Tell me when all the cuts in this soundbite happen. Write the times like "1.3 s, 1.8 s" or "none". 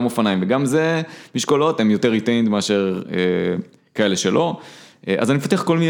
none